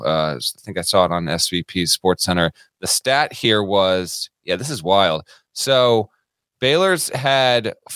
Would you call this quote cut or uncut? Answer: uncut